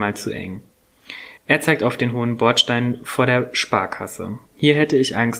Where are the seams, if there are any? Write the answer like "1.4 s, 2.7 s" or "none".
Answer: 1.4 s, 4.5 s